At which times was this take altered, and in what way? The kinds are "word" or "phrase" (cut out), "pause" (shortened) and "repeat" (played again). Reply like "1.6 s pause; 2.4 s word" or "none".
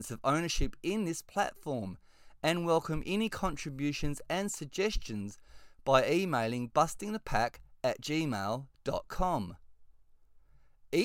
none